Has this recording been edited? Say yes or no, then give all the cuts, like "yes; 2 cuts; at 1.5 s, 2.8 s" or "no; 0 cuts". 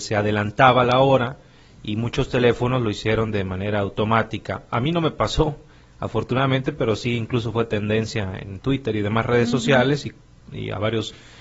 no; 0 cuts